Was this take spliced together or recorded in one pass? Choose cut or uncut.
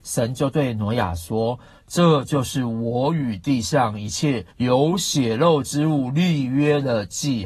cut